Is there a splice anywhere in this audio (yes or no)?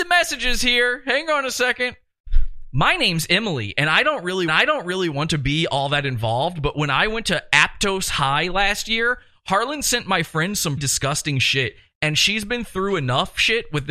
yes